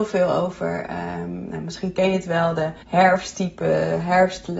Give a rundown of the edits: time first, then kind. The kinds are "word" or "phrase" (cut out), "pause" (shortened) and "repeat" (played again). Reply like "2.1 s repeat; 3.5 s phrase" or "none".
2.8 s pause